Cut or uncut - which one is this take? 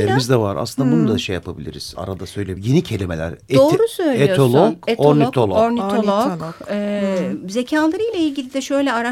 uncut